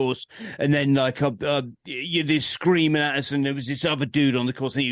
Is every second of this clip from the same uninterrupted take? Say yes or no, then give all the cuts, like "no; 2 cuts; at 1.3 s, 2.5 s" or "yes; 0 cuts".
yes; 0 cuts